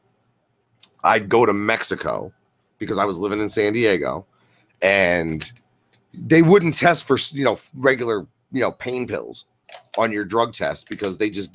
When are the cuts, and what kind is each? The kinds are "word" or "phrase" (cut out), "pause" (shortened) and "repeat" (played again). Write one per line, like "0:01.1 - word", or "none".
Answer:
none